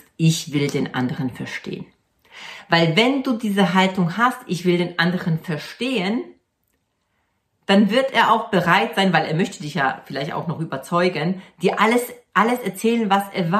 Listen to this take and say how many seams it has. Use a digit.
0